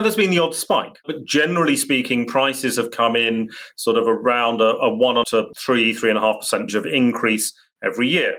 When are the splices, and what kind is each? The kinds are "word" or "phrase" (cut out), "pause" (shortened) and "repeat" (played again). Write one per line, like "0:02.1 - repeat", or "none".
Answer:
0:05.2 - phrase
0:06.7 - word